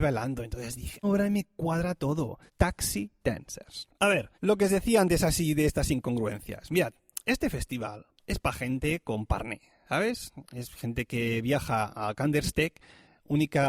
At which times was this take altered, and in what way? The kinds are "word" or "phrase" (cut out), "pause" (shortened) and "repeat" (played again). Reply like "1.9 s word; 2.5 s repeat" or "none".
1.0 s word; 2.5 s pause; 3.9 s pause; 4.3 s pause; 8.2 s pause